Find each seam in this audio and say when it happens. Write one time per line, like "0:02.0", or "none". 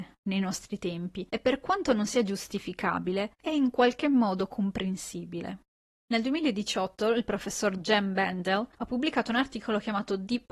0:08.7